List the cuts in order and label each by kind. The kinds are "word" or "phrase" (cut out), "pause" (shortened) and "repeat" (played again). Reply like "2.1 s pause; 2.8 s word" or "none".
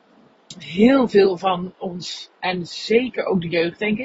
2.4 s pause

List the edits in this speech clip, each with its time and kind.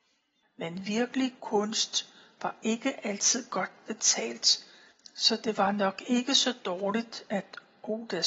1.4 s word

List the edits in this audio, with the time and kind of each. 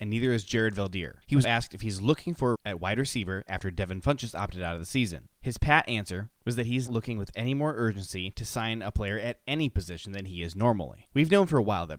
1.4 s word; 2.5 s phrase; 6.9 s word

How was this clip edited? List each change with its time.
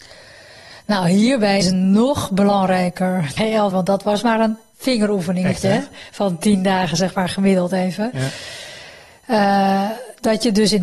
1.6 s word; 3.4 s word; 3.7 s word

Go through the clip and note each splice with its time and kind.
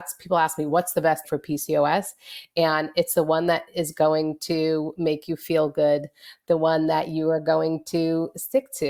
1.2 s word

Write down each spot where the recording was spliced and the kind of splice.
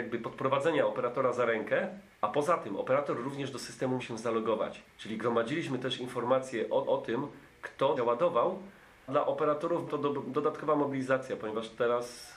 2.1 s pause; 4.0 s word; 4.9 s pause; 6.8 s repeat; 8.0 s phrase; 9.1 s word; 9.9 s word

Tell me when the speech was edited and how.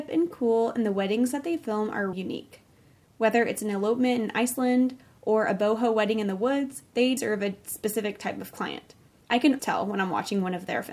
2.1 s word; 7.2 s word; 9.2 s pause; 9.6 s word

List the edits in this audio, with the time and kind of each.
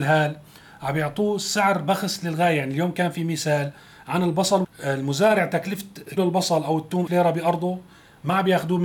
4.6 s word; 6.2 s word; 7.1 s word

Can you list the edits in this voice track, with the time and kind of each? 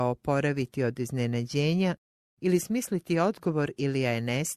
none

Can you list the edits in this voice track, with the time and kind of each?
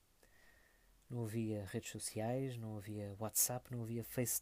none

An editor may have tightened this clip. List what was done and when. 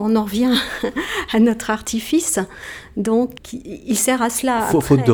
3.4 s word

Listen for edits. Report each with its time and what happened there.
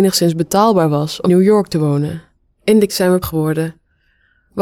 1.3 s word; 2.4 s pause; 2.9 s word; 3.2 s word

